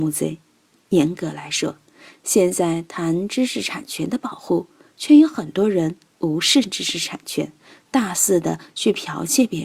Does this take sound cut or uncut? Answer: uncut